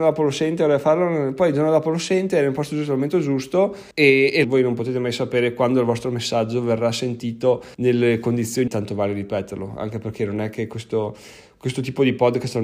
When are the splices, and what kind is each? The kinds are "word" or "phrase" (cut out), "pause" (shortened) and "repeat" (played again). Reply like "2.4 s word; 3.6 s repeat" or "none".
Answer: 3.9 s pause; 4.4 s phrase; 7.7 s pause; 8.7 s phrase